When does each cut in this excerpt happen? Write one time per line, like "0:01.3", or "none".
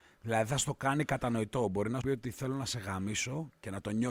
0:02.0